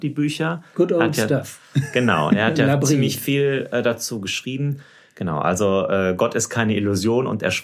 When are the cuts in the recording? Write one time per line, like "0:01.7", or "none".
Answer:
none